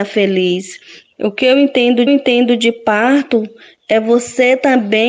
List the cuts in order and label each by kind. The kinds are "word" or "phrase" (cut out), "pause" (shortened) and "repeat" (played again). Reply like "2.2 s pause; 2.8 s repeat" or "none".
2.1 s repeat